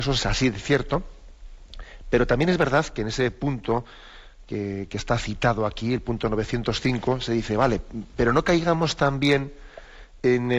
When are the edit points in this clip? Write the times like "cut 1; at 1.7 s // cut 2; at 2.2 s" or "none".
none